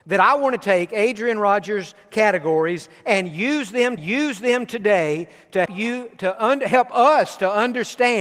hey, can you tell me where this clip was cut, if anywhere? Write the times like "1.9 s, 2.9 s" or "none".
4.0 s, 5.7 s